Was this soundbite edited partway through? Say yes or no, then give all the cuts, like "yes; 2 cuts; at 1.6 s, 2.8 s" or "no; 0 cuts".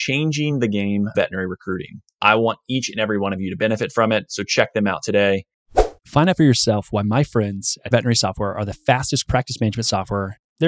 yes; 4 cuts; at 1.1 s, 6.0 s, 7.9 s, 9.2 s